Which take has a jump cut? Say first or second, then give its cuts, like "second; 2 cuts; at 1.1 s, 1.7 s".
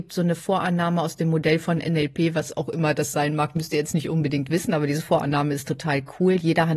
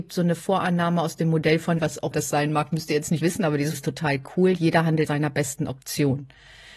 second; 5 cuts; at 1.8 s, 2.1 s, 3.2 s, 3.7 s, 5.1 s